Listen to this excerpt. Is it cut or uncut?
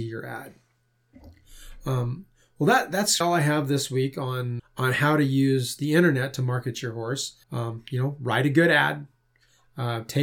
cut